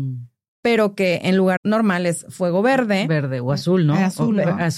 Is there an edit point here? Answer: yes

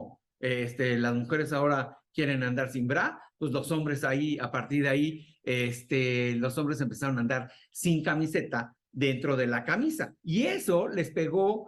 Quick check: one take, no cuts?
no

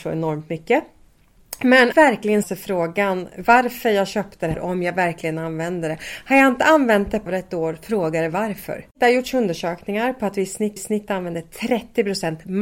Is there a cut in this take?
yes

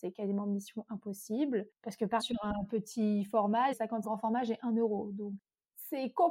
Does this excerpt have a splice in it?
yes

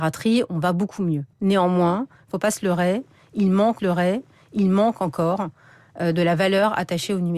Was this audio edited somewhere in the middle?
yes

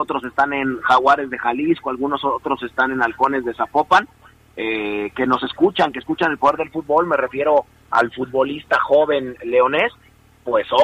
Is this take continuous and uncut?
yes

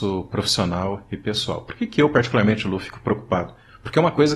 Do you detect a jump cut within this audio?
no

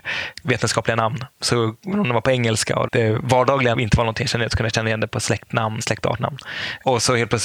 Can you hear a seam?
yes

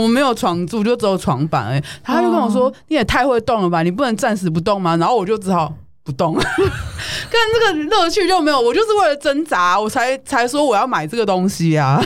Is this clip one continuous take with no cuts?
yes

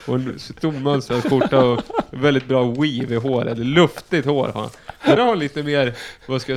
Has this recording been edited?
yes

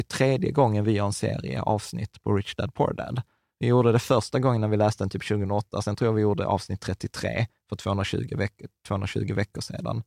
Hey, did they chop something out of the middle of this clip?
no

